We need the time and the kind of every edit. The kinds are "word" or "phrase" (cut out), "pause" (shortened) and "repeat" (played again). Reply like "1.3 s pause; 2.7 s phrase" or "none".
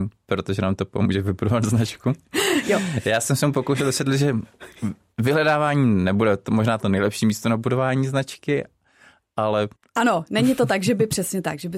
9.7 s pause